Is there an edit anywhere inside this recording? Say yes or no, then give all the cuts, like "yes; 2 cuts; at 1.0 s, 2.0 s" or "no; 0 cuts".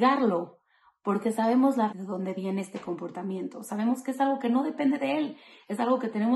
yes; 1 cut; at 1.9 s